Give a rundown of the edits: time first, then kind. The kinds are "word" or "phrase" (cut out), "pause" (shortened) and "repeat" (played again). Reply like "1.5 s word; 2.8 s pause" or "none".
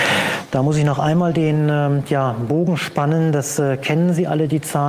none